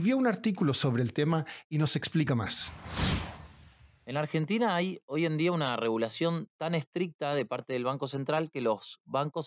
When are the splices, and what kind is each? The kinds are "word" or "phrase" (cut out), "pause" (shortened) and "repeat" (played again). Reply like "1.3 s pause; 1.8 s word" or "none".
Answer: none